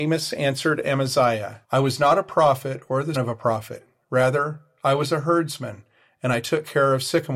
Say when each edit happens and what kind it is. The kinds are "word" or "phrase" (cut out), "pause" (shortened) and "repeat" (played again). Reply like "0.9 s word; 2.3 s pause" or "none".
1.6 s pause; 3.1 s word